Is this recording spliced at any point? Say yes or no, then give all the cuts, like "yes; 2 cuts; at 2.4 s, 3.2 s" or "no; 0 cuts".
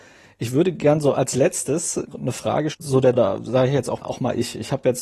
yes; 4 cuts; at 2.1 s, 2.7 s, 3.1 s, 4.0 s